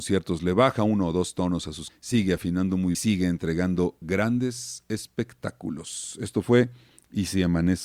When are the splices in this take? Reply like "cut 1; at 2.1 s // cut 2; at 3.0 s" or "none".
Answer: cut 1; at 1.9 s // cut 2; at 2.9 s